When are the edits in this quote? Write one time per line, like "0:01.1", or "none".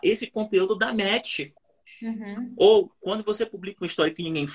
0:01.6